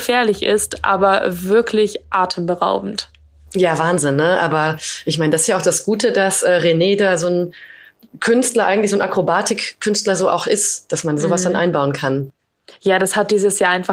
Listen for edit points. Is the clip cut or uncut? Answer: uncut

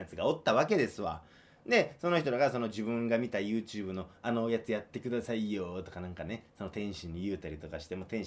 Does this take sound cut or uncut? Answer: uncut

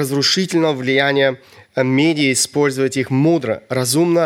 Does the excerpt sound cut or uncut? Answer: uncut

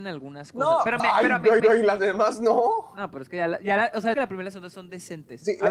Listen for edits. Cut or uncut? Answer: cut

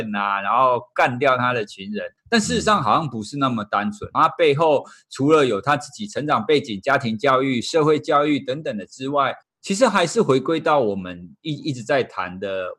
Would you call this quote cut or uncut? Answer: cut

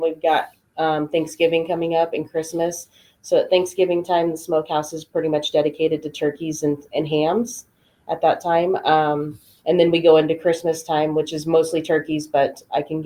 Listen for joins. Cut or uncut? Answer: uncut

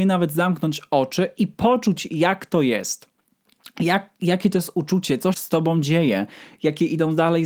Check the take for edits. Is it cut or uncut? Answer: cut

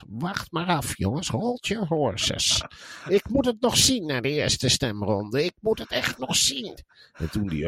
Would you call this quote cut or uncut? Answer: uncut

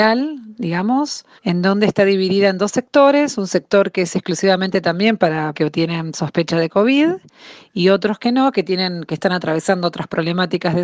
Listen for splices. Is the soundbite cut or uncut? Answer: cut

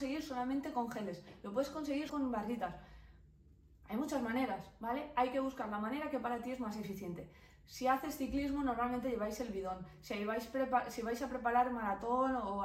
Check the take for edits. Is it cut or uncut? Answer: cut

